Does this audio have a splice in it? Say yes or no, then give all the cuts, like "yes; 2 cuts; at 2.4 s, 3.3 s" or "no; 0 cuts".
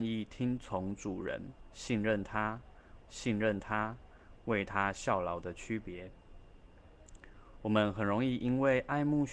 yes; 1 cut; at 3.1 s